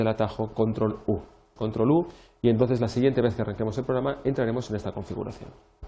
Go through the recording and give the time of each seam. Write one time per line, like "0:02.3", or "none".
0:01.6